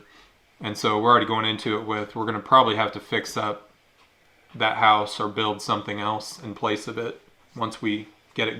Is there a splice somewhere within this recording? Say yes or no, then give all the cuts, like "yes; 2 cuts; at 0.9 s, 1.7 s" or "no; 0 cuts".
no; 0 cuts